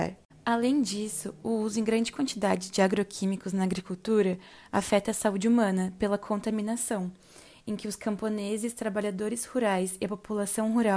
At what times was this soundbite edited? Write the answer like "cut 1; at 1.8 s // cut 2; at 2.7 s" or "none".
none